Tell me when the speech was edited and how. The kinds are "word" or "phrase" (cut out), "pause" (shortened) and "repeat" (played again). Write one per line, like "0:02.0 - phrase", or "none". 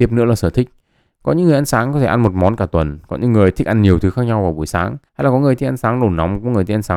0:05.1 - pause